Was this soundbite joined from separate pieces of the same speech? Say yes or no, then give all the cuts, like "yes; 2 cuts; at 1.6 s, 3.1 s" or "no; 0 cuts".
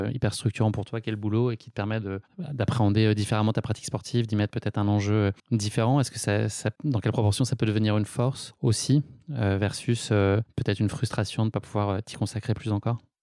yes; 2 cuts; at 5.4 s, 6.8 s